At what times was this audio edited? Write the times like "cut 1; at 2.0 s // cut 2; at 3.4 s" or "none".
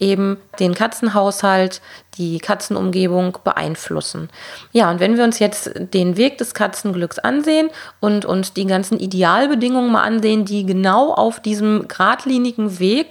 none